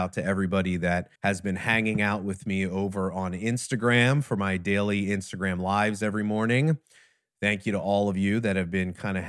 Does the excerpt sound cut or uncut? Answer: cut